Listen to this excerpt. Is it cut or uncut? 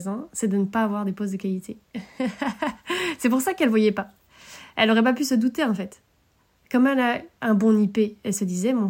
uncut